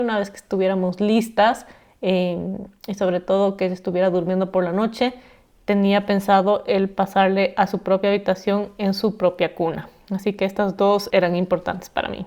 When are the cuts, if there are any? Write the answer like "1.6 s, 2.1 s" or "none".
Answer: 11.1 s